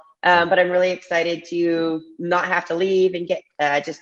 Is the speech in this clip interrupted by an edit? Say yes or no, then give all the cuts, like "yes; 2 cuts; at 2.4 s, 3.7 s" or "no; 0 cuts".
no; 0 cuts